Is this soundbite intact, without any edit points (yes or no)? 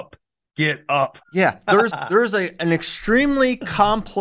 no